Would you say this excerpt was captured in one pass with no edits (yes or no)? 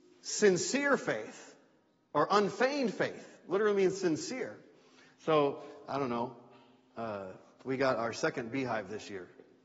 yes